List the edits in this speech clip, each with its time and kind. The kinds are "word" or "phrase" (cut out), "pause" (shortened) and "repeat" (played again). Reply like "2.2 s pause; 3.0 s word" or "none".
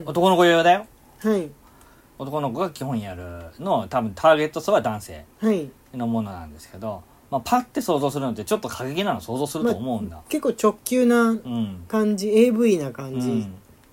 none